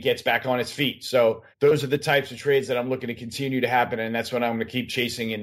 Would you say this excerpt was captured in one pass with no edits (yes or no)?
no